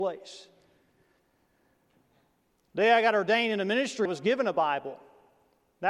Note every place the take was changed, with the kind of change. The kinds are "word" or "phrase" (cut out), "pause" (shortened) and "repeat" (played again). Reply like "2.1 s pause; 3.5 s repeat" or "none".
4.1 s word